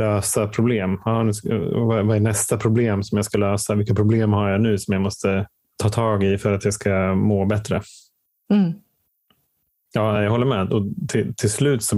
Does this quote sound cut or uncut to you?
uncut